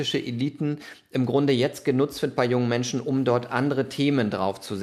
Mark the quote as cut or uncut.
uncut